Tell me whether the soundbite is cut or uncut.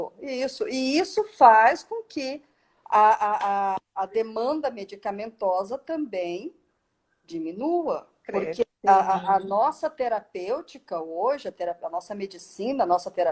cut